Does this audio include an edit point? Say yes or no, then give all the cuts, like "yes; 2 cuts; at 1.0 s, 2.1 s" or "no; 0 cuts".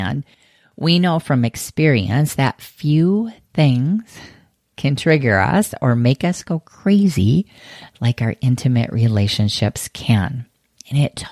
no; 0 cuts